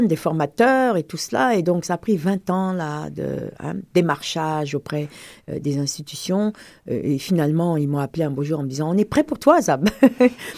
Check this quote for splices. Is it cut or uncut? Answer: uncut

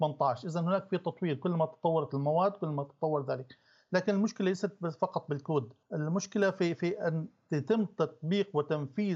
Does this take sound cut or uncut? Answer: cut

